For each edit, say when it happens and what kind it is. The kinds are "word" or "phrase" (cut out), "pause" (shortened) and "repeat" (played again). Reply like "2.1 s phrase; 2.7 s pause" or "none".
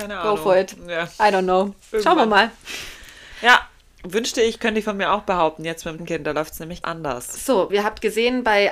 6.0 s word; 6.8 s word; 7.7 s word